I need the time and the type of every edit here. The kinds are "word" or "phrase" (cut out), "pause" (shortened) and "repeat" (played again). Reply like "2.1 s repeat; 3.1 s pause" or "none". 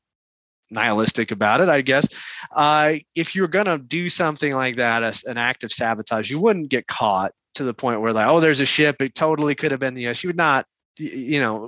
none